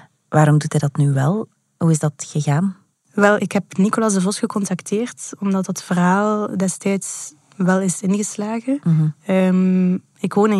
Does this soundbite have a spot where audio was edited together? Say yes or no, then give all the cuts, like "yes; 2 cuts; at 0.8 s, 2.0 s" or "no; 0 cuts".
no; 0 cuts